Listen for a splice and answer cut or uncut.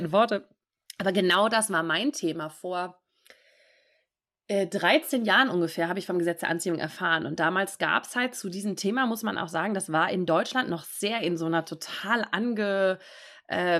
uncut